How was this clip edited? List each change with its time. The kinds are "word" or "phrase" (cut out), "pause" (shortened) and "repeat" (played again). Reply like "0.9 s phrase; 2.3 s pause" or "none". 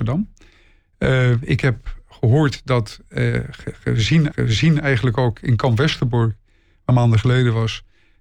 4.3 s repeat; 6.9 s phrase